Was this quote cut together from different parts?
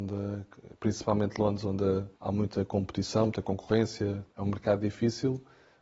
yes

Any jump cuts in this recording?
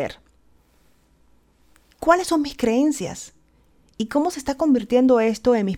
no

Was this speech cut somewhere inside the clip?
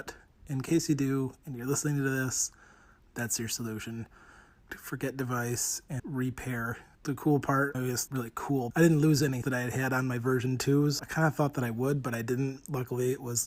yes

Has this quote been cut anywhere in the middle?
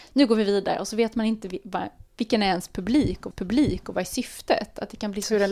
yes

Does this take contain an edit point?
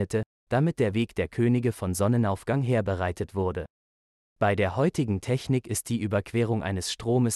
no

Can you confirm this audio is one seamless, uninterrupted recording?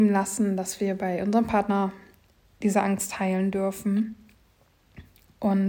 yes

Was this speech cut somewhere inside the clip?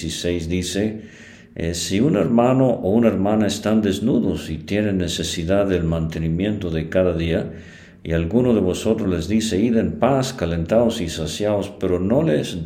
no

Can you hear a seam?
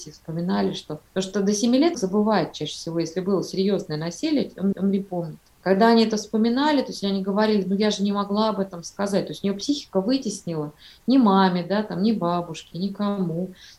yes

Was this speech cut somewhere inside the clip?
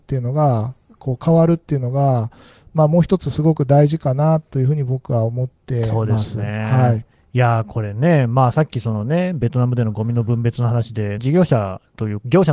yes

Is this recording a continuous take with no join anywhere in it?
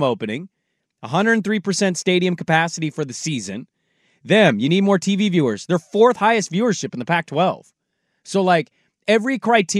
yes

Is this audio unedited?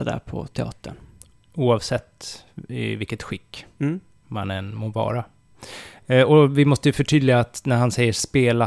yes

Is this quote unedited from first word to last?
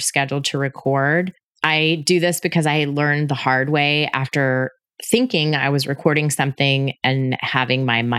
yes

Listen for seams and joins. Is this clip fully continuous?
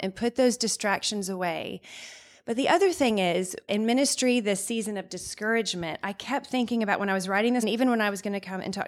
no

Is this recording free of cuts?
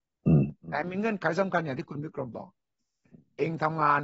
yes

